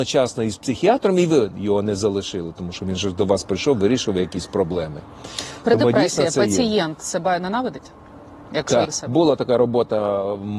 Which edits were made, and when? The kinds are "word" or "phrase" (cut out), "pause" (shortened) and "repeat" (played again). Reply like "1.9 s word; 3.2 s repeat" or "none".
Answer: 8.8 s word